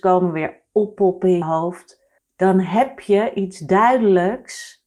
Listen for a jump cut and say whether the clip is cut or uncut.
cut